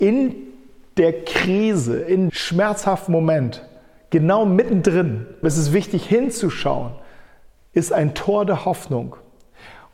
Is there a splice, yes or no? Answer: yes